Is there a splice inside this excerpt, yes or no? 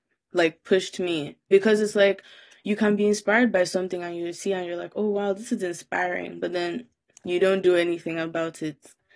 no